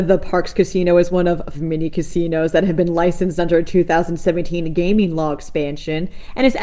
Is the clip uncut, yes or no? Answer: no